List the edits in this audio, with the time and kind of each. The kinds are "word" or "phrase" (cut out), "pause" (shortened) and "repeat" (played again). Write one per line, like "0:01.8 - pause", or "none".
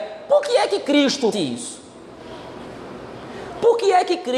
0:01.3 - word

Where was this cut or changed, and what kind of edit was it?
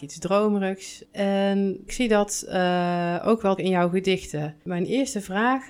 0:01.9 - word
0:03.6 - word
0:04.6 - pause

